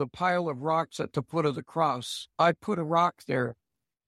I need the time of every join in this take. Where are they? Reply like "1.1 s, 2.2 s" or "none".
none